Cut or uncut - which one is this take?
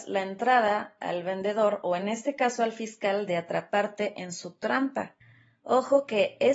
uncut